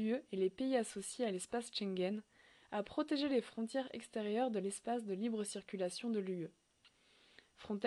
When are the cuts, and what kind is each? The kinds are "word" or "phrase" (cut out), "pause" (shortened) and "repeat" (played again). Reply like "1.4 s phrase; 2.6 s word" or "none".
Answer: none